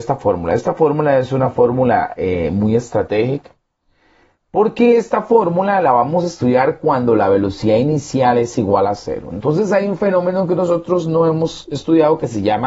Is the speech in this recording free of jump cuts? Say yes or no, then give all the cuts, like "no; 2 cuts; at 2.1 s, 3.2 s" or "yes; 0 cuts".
yes; 0 cuts